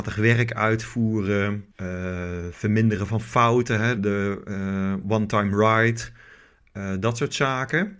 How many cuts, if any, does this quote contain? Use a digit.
2